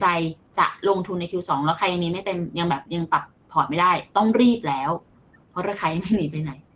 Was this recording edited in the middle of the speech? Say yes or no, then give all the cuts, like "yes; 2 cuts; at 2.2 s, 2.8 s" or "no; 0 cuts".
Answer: no; 0 cuts